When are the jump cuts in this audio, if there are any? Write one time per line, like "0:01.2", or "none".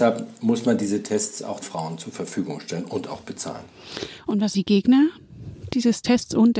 0:01.6
0:04.5